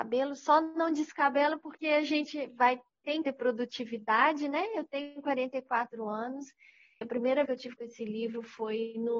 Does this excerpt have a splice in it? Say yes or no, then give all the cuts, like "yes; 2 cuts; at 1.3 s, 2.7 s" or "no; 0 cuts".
yes; 4 cuts; at 3.2 s, 7.0 s, 7.5 s, 7.8 s